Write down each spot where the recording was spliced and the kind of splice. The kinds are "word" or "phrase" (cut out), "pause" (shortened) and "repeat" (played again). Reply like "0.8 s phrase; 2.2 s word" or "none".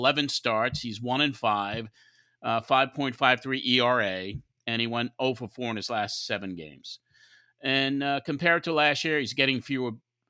none